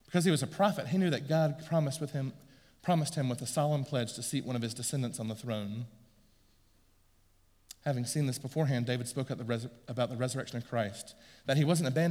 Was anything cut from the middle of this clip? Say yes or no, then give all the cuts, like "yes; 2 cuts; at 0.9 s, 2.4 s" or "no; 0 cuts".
no; 0 cuts